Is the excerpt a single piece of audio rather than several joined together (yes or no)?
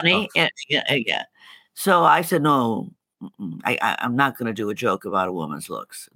yes